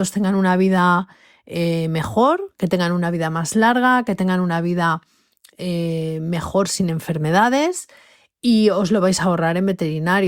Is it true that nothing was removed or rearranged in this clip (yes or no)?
yes